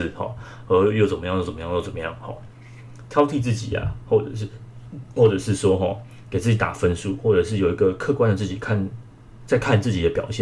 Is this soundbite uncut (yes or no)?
yes